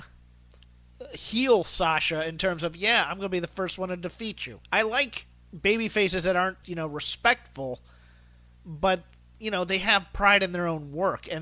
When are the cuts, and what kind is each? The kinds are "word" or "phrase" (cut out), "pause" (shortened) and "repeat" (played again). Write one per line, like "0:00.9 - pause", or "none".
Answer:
0:04.6 - pause
0:06.6 - word